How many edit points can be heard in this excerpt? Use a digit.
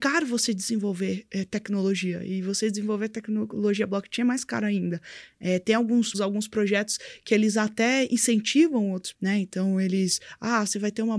2